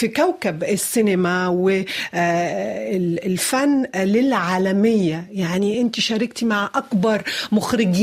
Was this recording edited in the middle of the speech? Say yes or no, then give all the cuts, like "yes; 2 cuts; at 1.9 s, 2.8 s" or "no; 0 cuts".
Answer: no; 0 cuts